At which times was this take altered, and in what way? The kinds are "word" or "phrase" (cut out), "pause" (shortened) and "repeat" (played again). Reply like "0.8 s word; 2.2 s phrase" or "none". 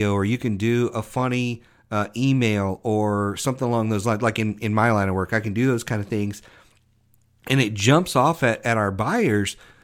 none